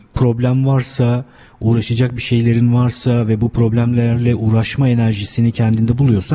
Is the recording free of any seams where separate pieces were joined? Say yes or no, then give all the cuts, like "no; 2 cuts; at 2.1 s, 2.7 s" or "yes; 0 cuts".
yes; 0 cuts